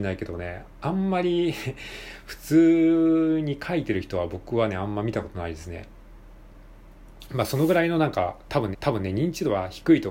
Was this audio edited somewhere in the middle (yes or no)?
yes